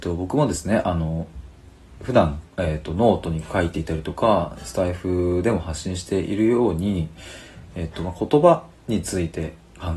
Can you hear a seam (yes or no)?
yes